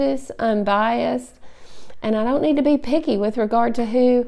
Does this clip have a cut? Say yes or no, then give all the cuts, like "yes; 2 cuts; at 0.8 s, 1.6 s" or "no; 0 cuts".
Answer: no; 0 cuts